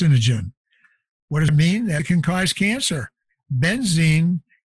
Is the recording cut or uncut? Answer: cut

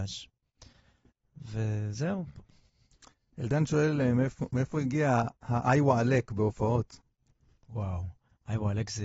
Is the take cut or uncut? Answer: uncut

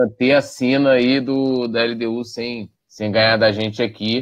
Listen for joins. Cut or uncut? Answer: cut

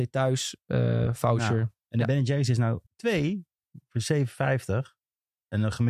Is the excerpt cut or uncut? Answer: cut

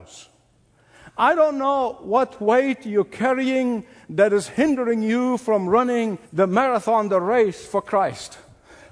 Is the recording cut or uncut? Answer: cut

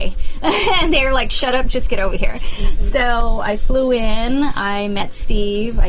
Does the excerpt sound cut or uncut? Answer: uncut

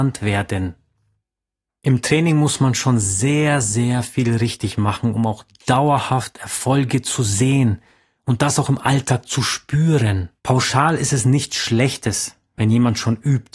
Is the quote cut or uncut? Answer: cut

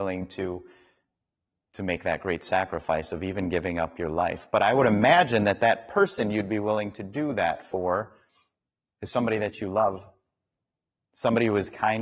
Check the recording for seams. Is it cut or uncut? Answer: uncut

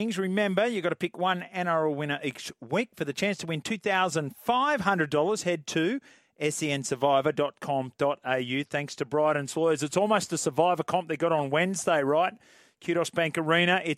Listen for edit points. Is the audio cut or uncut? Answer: uncut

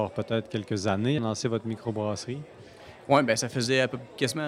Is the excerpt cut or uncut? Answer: cut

